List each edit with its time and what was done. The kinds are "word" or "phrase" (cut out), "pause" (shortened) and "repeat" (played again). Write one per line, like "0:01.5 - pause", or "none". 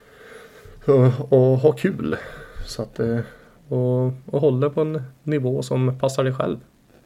none